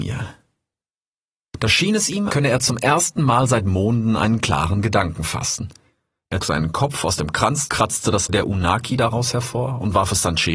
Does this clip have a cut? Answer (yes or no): yes